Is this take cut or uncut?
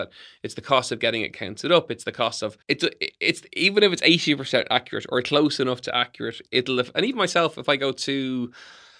cut